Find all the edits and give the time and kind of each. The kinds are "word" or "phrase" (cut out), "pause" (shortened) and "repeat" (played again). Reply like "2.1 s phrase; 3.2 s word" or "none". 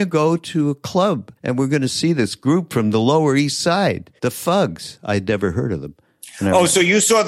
1.4 s pause; 4.2 s pause